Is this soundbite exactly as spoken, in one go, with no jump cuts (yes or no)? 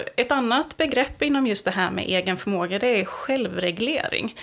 yes